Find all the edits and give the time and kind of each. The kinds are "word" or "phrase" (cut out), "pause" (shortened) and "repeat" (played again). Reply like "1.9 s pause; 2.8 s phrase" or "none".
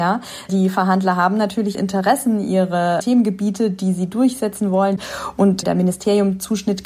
1.7 s word